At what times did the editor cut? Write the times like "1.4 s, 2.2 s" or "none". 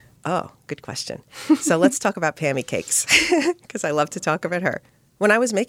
none